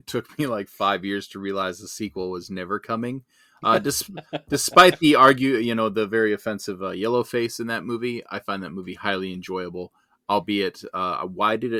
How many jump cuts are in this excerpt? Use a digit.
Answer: 0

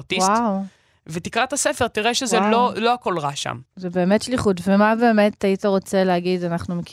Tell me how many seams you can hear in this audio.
1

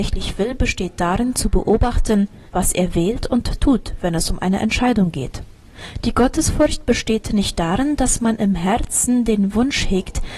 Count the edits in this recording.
1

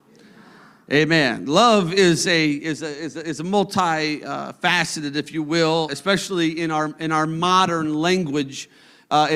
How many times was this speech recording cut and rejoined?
1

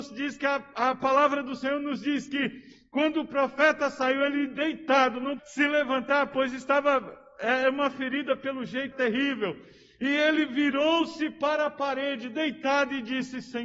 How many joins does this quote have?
2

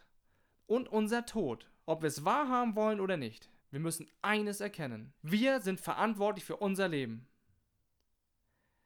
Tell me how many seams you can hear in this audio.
3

